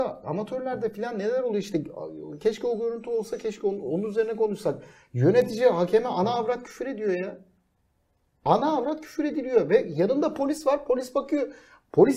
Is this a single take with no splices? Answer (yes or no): yes